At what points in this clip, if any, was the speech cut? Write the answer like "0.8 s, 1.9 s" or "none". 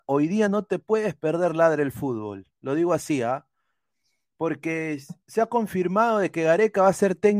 2.6 s, 5.2 s